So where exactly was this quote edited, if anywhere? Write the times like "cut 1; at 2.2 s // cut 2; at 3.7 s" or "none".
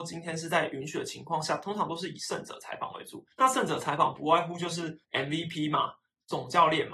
cut 1; at 3.3 s // cut 2; at 5.0 s